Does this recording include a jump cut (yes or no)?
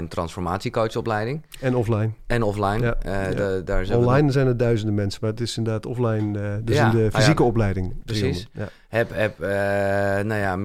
no